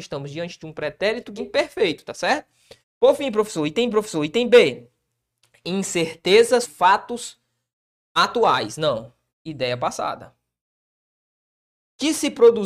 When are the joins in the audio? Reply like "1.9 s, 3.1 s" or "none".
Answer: 1.4 s, 2.8 s, 3.9 s, 6.6 s, 9.3 s

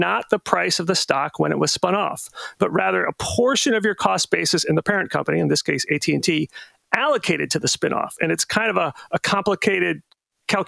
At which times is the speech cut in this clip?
none

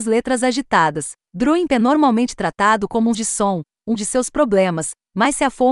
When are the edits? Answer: 1.7 s, 3.1 s, 4.0 s

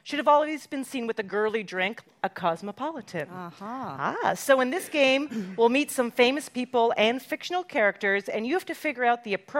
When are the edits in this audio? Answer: none

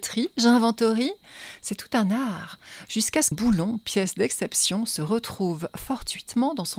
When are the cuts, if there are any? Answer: 3.3 s

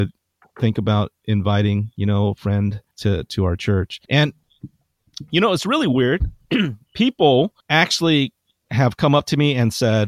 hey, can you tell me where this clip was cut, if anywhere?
2.9 s, 4.0 s, 7.6 s

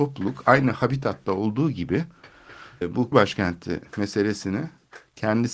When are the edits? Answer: 2.8 s, 3.1 s

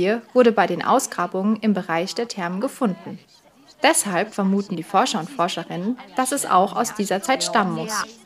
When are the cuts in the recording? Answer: 6.1 s

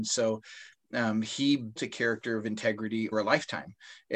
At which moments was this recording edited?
1.8 s, 3.1 s

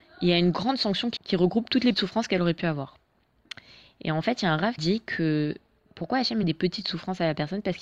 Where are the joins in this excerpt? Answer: 1.2 s, 1.9 s, 4.8 s, 6.4 s

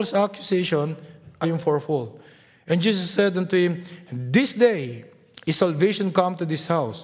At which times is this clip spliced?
1.4 s

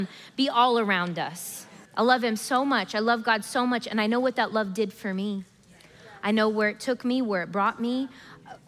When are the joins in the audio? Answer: 1.9 s

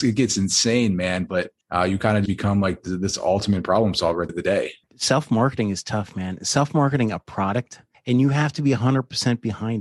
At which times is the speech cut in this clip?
1.6 s, 2.3 s, 4.3 s, 4.8 s, 7.9 s

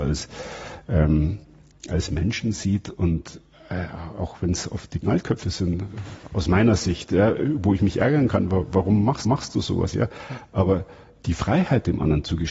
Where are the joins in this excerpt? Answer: 5.0 s, 9.3 s, 11.2 s

